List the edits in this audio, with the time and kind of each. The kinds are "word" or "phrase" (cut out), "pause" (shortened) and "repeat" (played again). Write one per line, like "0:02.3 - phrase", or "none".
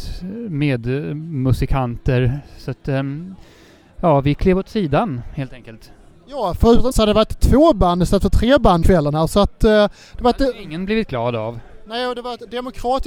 0:06.9 - word
0:08.8 - word